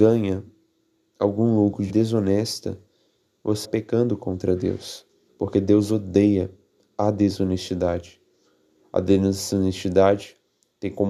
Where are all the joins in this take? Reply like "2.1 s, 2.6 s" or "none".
1.9 s, 3.6 s, 5.3 s